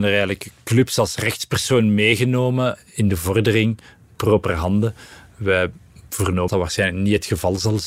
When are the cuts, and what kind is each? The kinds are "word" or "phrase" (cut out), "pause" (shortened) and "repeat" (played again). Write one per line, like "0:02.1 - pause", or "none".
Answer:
0:06.5 - word